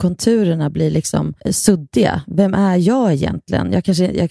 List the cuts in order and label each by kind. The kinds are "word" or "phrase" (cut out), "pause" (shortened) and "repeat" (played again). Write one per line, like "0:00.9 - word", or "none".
0:01.4 - pause